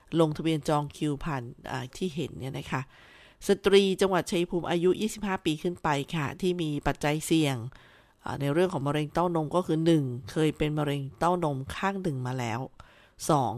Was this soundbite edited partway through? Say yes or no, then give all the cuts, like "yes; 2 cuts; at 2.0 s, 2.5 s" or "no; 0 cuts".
yes; 1 cut; at 1.9 s